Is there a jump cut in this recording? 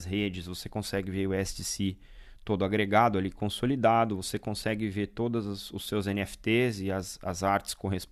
no; 0 cuts

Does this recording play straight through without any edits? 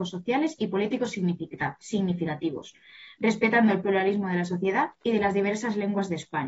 yes; 0 cuts

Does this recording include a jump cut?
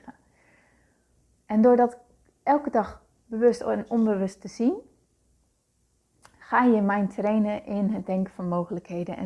no; 0 cuts

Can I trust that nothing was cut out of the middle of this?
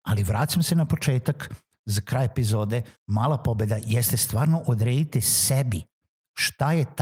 no; 1 cut; at 3.0 s

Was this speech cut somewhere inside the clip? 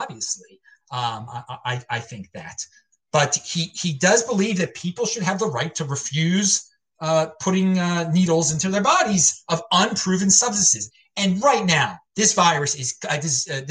yes; 1 cut; at 12.1 s

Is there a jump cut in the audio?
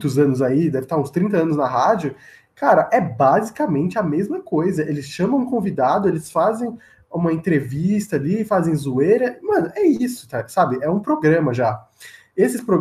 no; 0 cuts

